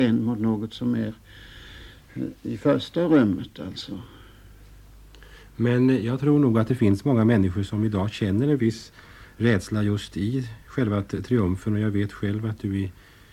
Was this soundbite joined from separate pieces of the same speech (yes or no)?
no